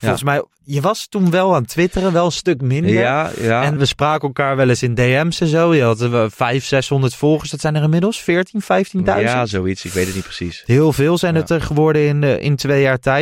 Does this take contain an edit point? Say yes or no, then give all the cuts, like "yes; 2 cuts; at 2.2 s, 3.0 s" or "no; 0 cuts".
yes; 1 cut; at 3.8 s